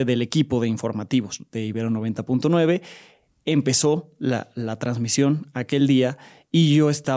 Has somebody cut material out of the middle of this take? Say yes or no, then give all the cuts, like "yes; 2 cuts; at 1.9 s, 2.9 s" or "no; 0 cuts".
no; 0 cuts